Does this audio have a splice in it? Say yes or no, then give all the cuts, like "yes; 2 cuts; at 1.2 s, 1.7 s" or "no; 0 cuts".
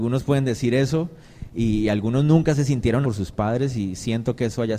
yes; 1 cut; at 3.0 s